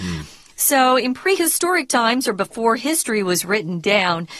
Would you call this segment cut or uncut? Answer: uncut